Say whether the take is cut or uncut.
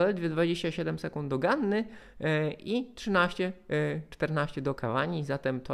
uncut